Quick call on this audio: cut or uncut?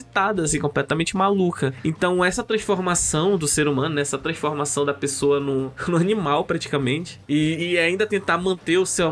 uncut